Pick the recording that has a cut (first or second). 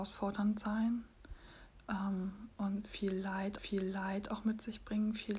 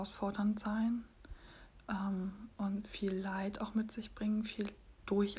first